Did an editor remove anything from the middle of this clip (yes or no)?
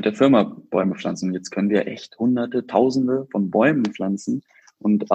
no